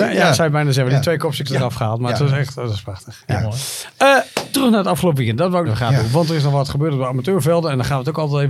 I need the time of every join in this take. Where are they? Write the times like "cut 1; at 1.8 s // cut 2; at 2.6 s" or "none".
cut 1; at 1.4 s // cut 2; at 4.5 s // cut 3; at 5.7 s